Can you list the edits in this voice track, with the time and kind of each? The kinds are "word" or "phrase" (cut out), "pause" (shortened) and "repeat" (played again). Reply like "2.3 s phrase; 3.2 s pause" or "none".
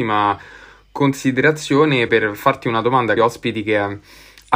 2.1 s word; 3.2 s phrase